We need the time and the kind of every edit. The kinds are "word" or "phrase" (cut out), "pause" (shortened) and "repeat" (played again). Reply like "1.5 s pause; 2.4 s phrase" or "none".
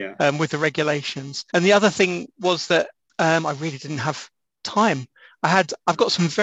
1.5 s pause; 3.1 s pause